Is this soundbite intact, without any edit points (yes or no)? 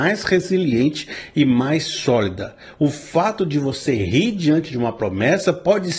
yes